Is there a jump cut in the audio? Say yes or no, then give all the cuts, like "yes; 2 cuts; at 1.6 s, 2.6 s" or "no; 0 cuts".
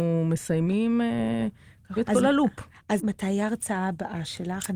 yes; 2 cuts; at 2.0 s, 3.0 s